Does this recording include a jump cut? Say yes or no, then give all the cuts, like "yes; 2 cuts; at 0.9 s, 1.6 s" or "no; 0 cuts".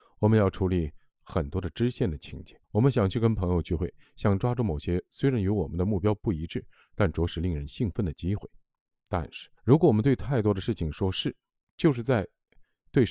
yes; 2 cuts; at 2.6 s, 9.6 s